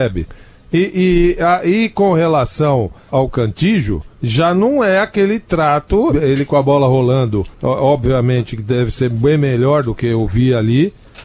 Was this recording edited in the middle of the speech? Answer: yes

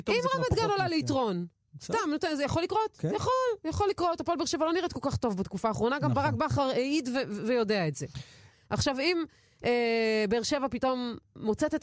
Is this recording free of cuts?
yes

